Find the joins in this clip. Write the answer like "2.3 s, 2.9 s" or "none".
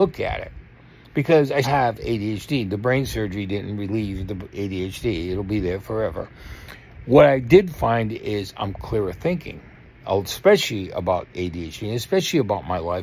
1.6 s, 10.0 s